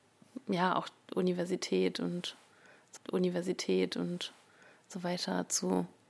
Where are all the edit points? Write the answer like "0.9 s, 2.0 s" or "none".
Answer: 3.0 s